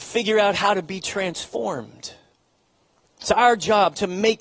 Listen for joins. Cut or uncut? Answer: uncut